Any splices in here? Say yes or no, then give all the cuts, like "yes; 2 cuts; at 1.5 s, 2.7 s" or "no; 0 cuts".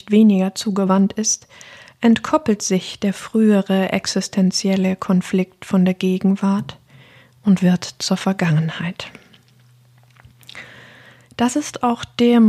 no; 0 cuts